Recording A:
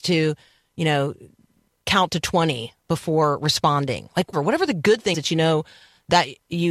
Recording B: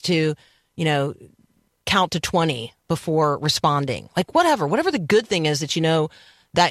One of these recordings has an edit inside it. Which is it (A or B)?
A